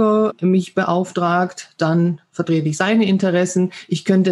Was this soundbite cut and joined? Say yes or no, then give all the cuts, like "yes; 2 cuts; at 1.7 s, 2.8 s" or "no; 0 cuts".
no; 0 cuts